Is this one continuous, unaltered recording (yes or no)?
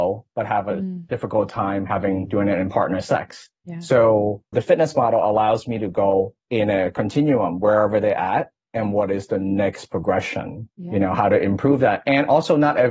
no